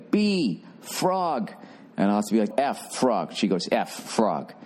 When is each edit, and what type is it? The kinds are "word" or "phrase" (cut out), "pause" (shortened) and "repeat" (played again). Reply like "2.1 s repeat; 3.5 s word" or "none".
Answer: 2.5 s word

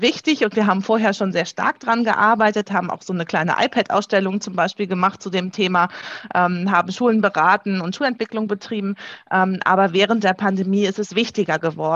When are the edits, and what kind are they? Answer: none

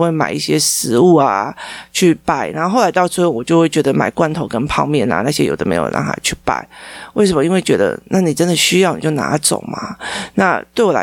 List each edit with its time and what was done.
none

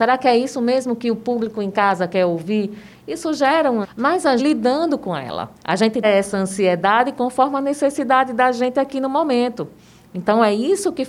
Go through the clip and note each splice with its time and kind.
3.8 s word; 4.4 s phrase; 5.5 s pause; 6.0 s word

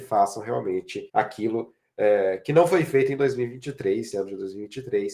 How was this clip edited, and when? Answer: 1.1 s pause; 4.1 s word

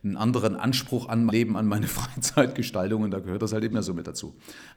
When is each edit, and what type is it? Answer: 1.3 s word; 3.7 s word

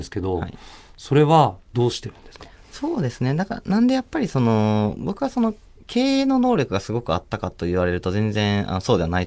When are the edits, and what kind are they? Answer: none

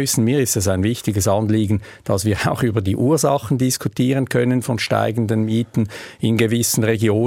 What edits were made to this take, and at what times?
none

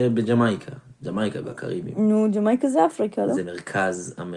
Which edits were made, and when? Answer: none

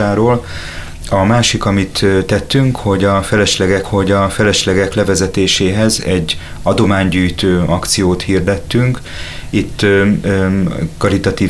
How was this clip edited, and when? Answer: 3.8 s repeat

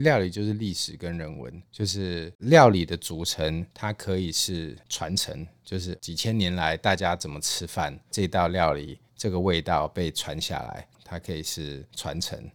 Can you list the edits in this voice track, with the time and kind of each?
1.7 s pause

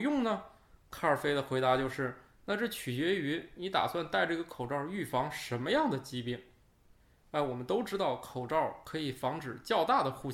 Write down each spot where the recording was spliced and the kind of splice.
none

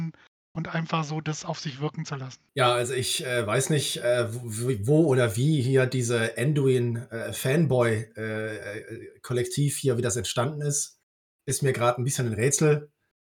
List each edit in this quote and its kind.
none

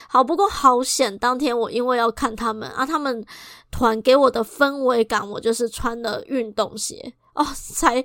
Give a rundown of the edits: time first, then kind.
none

